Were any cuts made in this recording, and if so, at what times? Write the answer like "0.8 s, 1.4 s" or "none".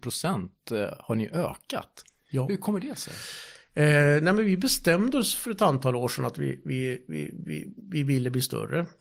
none